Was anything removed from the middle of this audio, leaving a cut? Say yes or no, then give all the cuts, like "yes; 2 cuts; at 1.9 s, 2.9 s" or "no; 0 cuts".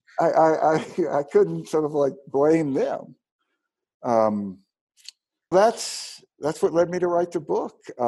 yes; 1 cut; at 5.5 s